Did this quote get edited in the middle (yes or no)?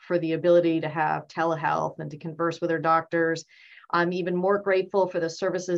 no